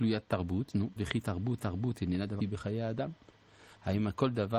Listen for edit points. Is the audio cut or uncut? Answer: cut